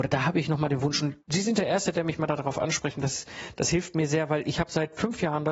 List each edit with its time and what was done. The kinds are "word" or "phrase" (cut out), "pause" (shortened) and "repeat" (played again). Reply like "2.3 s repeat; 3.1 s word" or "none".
1.2 s pause